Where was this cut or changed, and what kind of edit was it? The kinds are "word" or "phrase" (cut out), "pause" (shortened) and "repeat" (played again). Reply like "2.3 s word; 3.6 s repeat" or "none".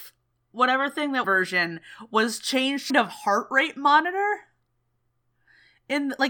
1.2 s phrase; 2.9 s phrase